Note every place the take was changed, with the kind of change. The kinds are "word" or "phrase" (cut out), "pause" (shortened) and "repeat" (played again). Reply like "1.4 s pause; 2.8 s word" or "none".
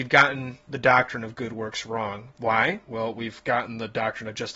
2.3 s pause